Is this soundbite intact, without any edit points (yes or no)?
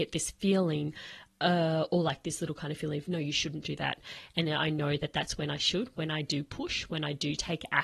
yes